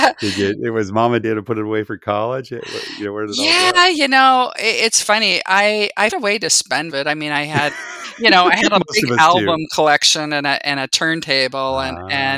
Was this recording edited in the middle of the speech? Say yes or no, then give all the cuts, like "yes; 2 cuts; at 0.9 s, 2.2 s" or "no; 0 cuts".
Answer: yes; 3 cuts; at 1.2 s, 6.1 s, 6.9 s